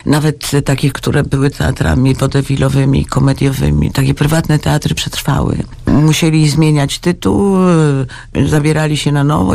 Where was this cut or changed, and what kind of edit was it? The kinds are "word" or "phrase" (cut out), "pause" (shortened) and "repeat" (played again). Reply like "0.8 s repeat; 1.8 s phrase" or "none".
1.5 s word; 5.0 s phrase